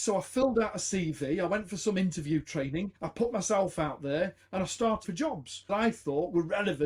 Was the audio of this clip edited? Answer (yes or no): yes